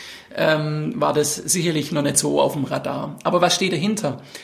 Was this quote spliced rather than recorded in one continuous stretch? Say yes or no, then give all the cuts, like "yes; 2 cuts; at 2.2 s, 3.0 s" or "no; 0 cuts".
no; 0 cuts